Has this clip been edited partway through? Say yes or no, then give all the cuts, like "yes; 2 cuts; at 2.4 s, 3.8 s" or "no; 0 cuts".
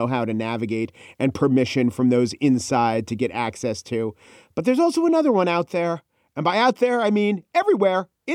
no; 0 cuts